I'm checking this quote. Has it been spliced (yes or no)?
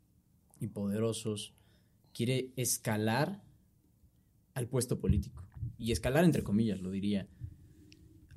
no